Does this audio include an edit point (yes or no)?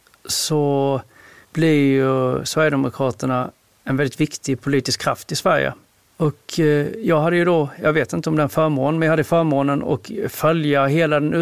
no